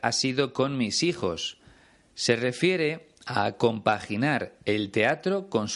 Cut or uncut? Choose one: uncut